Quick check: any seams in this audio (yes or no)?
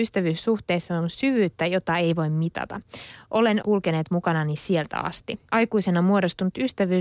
yes